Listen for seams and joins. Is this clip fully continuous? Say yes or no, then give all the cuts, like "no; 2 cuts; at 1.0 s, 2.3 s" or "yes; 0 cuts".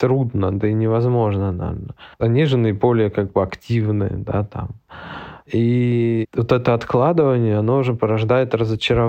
no; 1 cut; at 2.1 s